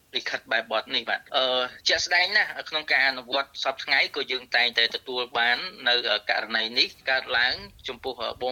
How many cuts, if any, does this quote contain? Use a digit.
3